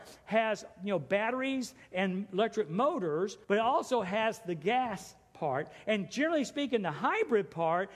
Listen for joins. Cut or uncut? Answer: cut